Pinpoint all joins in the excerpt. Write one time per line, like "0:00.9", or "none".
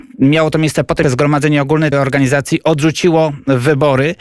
0:01.0
0:01.9

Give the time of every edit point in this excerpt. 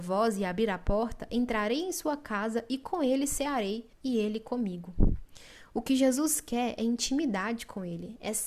0:03.9

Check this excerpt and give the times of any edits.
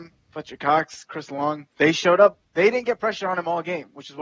0:01.7
0:02.4

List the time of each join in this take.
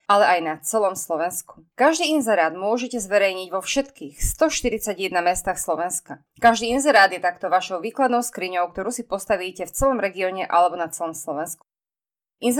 0:01.7

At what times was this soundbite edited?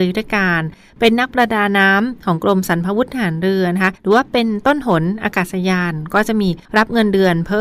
0:04.0
0:06.7

